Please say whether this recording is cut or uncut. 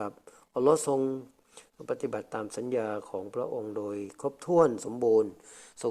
uncut